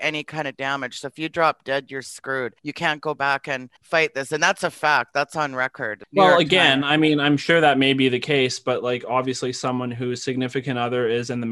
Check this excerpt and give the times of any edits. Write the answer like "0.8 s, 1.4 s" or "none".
2.6 s, 3.8 s